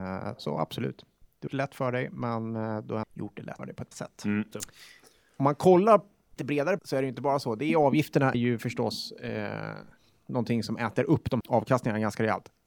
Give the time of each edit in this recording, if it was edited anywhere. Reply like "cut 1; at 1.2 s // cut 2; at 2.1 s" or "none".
cut 1; at 1.5 s // cut 2; at 3.0 s // cut 3; at 3.6 s // cut 4; at 3.9 s // cut 5; at 4.5 s // cut 6; at 6.4 s // cut 7; at 6.8 s // cut 8; at 8.3 s // cut 9; at 11.4 s